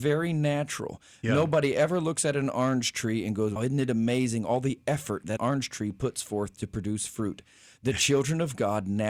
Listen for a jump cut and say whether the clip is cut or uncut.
cut